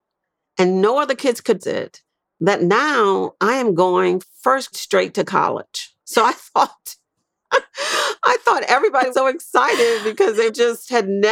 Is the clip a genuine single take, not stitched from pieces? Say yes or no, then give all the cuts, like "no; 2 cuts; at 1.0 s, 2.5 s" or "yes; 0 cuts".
no; 7 cuts; at 1.6 s, 2.1 s, 3.4 s, 4.2 s, 4.7 s, 6.0 s, 9.1 s